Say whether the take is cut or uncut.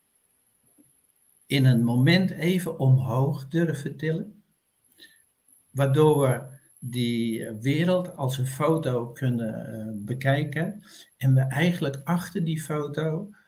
uncut